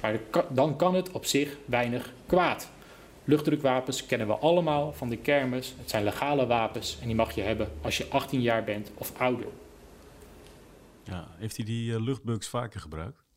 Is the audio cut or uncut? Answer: uncut